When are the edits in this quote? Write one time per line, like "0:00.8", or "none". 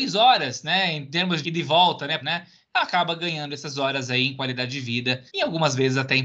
0:01.4
0:02.2
0:05.3

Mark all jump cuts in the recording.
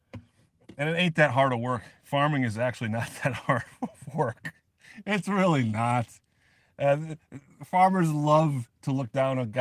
none

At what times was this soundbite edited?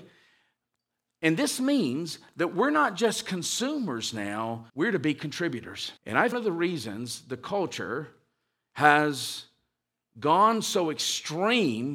0:04.7
0:06.0
0:06.3

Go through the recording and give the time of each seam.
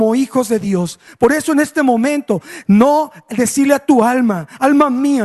none

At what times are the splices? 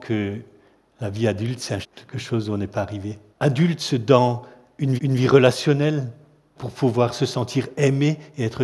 0:01.8
0:03.3
0:05.0
0:06.6

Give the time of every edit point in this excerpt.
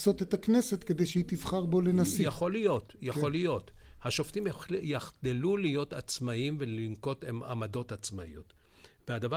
none

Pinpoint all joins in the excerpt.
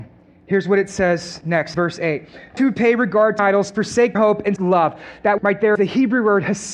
0:01.7
0:02.6
0:03.4
0:04.1
0:04.6
0:05.4
0:05.8

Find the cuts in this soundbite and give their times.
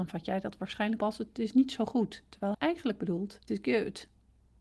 0:01.0
0:02.5
0:03.5

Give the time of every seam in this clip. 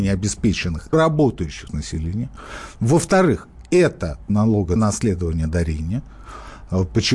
0:00.9
0:01.7
0:04.3
0:04.8

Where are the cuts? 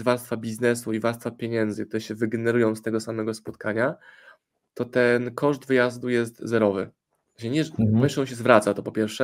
0:07.0

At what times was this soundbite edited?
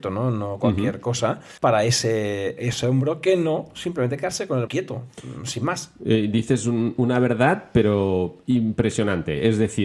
0:01.6
0:04.7

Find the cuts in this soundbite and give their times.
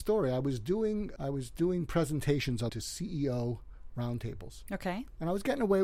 0:01.2
0:02.7

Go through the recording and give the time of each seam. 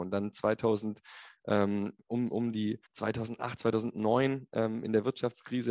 0:02.9

